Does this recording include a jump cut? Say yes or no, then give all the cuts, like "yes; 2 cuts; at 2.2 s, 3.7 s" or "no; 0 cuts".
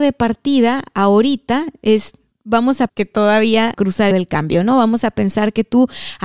yes; 4 cuts; at 2.3 s, 2.9 s, 3.7 s, 4.1 s